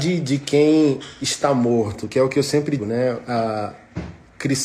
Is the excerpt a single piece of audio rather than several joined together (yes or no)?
no